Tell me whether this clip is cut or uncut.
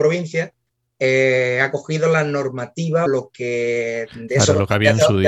cut